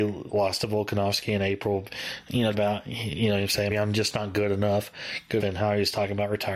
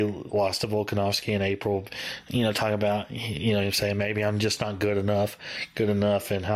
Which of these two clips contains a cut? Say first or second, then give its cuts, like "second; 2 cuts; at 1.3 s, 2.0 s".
first; 3 cuts; at 2.5 s, 3.7 s, 5.4 s